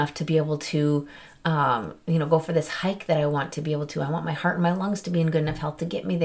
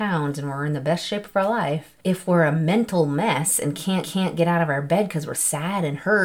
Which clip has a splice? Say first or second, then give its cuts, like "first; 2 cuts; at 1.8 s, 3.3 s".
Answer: second; 3 cuts; at 2.0 s, 4.0 s, 5.3 s